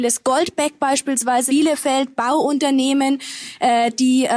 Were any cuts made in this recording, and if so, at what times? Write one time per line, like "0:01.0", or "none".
0:01.5